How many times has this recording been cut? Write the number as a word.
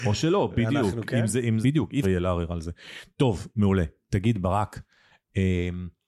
two